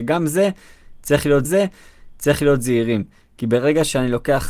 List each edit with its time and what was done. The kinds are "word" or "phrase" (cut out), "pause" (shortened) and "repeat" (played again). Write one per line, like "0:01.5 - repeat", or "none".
0:01.4 - repeat